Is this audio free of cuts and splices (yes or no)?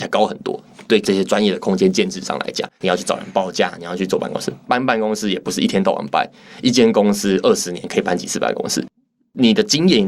no